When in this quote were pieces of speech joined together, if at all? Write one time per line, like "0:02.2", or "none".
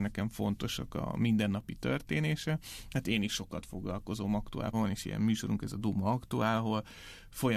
0:04.7